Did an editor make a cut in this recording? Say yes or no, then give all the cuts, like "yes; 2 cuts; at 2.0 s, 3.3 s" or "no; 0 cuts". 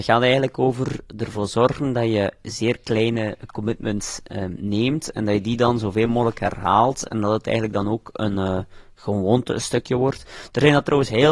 no; 0 cuts